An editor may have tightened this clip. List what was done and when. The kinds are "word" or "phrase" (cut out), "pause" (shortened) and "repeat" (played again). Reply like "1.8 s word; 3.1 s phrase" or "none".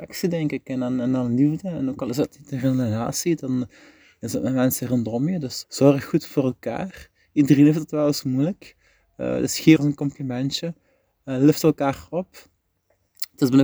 5.6 s word; 9.8 s word